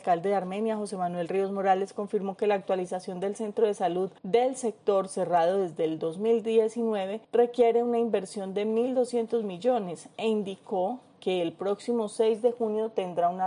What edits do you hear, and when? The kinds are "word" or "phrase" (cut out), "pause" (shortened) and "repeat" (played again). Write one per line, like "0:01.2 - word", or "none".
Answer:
0:04.2 - pause
0:07.2 - pause